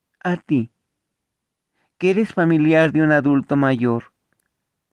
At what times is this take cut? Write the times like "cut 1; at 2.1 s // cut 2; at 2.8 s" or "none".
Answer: none